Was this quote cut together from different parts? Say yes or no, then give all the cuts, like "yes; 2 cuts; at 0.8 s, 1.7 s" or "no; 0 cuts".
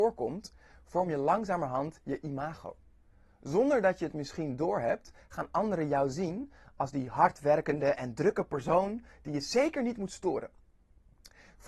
no; 0 cuts